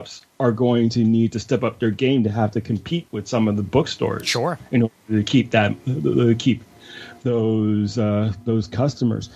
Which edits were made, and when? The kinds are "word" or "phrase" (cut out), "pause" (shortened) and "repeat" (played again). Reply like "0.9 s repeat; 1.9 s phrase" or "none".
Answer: none